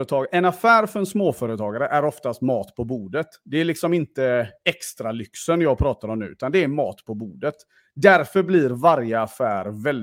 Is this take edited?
no; 0 cuts

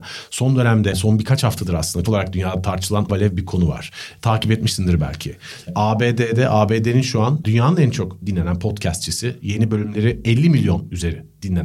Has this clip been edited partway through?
yes; 4 cuts; at 0.9 s, 2.1 s, 3.1 s, 7.4 s

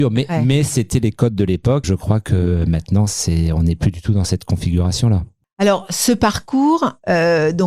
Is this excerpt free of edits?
no; 1 cut; at 1.8 s

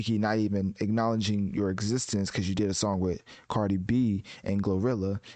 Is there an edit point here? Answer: no; 0 cuts

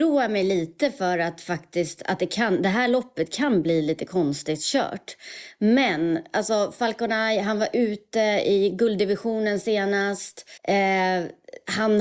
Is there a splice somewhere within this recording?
yes; 1 cut; at 10.6 s

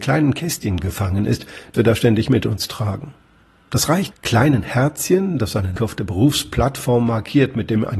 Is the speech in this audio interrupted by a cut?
yes; 3 cuts; at 1.7 s, 4.1 s, 5.8 s

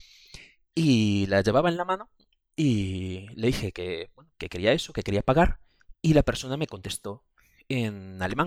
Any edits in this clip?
no; 0 cuts

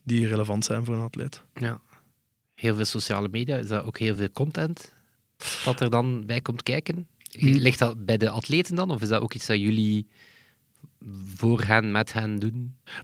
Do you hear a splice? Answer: no; 0 cuts

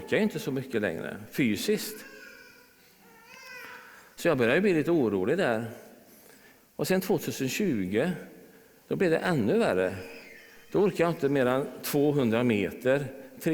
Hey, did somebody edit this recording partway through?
no; 0 cuts

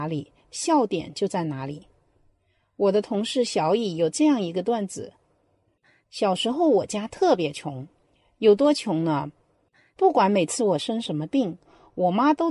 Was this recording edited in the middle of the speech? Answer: no; 0 cuts

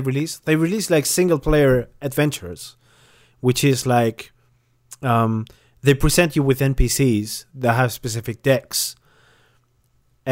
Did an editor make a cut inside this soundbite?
no; 0 cuts

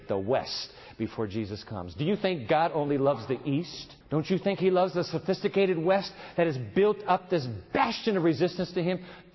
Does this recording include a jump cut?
yes; 1 cut; at 4.0 s

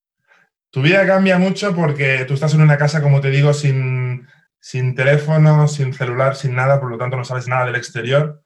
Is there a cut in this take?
no; 0 cuts

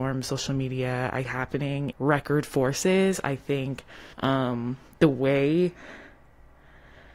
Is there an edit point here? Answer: yes; 3 cuts; at 1.2 s, 1.9 s, 4.1 s

